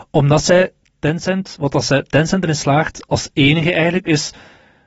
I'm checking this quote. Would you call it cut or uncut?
uncut